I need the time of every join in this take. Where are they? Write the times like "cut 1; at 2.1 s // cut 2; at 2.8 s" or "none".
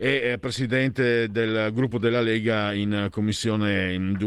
none